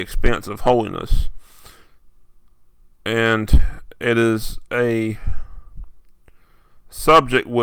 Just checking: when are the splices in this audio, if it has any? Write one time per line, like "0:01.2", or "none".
none